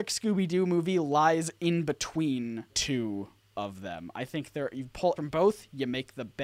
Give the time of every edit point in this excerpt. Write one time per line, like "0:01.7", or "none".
0:02.7
0:03.5
0:05.2